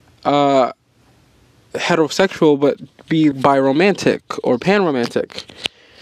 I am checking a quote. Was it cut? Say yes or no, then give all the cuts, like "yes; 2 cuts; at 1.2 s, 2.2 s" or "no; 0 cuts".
yes; 1 cut; at 3.3 s